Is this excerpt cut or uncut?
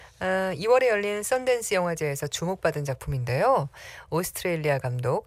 uncut